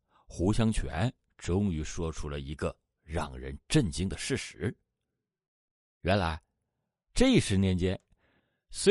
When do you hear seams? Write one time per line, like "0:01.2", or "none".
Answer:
none